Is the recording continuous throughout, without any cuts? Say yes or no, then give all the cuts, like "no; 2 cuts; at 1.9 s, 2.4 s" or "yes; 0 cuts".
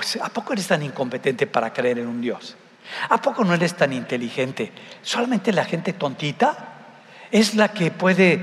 yes; 0 cuts